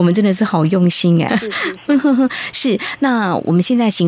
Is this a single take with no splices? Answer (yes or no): no